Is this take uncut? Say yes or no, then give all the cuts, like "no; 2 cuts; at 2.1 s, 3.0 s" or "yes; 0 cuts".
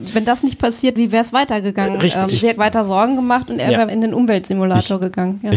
no; 3 cuts; at 1.0 s, 2.6 s, 3.9 s